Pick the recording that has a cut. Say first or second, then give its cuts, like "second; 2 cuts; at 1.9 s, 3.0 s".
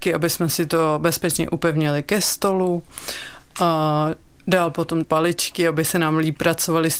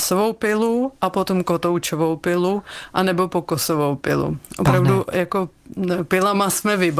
first; 1 cut; at 5.0 s